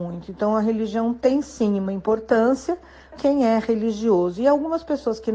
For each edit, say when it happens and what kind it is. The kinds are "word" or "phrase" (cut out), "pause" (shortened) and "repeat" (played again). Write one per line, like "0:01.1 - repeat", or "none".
0:03.1 - word